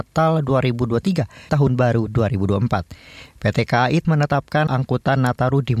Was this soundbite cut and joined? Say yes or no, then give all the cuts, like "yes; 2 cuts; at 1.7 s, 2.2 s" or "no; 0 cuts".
yes; 3 cuts; at 1.5 s, 4.0 s, 4.7 s